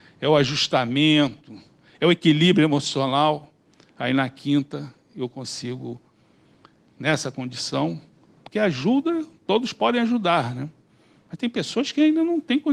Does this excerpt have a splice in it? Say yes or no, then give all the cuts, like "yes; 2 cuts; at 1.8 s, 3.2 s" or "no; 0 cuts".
no; 0 cuts